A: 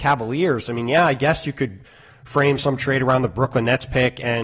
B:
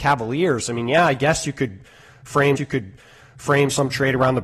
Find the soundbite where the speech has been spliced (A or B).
B